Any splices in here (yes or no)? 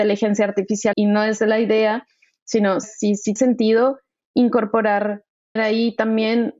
yes